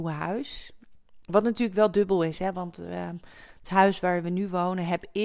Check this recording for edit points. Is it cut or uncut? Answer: uncut